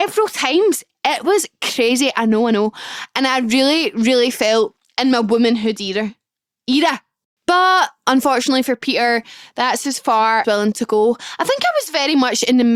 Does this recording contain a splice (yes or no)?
yes